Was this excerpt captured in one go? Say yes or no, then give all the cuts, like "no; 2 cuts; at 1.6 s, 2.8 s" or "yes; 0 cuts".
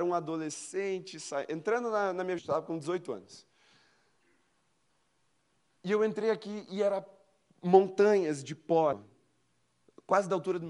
no; 2 cuts; at 2.4 s, 8.9 s